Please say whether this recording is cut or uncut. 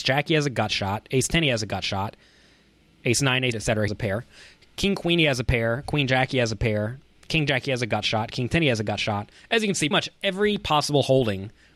cut